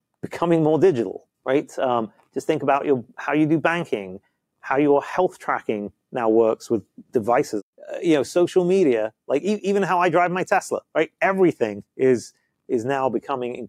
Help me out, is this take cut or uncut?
cut